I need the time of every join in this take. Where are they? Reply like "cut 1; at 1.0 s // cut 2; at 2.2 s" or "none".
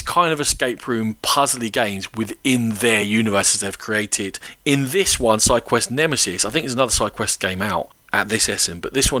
none